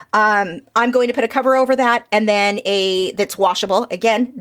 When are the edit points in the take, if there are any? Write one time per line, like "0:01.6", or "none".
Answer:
none